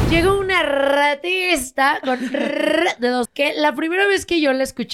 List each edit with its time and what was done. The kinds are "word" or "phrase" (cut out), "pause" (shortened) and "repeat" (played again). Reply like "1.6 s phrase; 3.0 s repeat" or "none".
3.2 s word